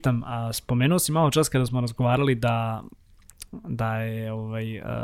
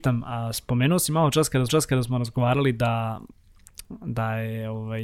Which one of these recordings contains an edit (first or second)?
second